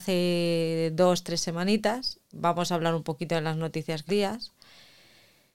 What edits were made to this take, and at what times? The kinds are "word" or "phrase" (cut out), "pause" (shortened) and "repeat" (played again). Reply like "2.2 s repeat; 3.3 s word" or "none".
2.3 s word; 4.1 s phrase